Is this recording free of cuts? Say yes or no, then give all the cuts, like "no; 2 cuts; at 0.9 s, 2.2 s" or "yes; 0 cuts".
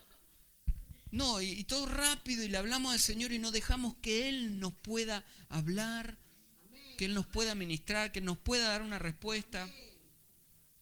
yes; 0 cuts